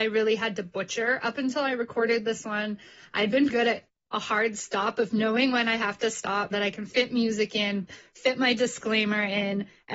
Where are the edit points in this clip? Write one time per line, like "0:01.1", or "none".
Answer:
0:03.5
0:06.5